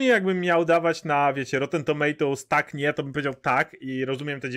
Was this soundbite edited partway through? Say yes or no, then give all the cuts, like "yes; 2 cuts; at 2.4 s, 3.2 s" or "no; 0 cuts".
no; 0 cuts